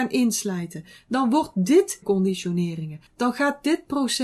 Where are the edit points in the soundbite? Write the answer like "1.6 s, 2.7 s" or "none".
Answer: 2.0 s, 3.1 s